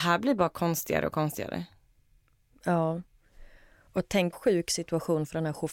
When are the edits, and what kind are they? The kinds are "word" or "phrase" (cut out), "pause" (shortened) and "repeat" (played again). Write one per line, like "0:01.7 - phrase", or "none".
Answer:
0:04.3 - word

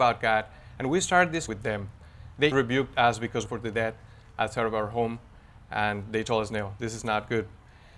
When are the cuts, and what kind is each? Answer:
0:01.5 - word
0:02.5 - word
0:03.5 - phrase

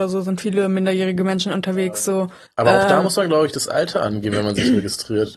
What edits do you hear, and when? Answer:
0:02.5 - pause

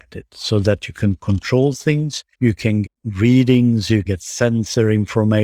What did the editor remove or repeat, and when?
0:02.3 - pause
0:02.8 - word
0:04.1 - word

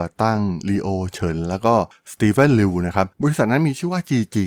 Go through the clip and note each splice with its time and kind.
0:03.1 - pause

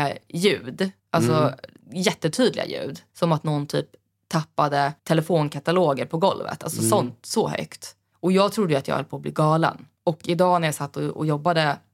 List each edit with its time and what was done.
0:01.0 - pause
0:03.1 - pause
0:05.0 - pause
0:08.1 - pause
0:10.0 - pause

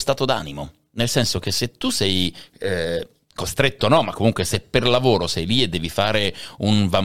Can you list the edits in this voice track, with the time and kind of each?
none

